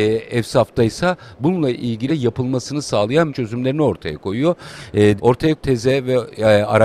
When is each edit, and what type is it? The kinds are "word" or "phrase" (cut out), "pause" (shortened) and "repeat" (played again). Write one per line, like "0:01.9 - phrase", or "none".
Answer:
0:02.1 - word
0:03.3 - word
0:05.2 - word
0:05.6 - word